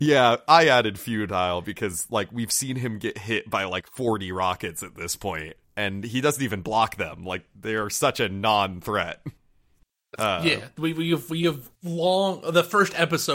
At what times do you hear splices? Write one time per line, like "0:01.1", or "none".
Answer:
0:05.6
0:09.4
0:11.7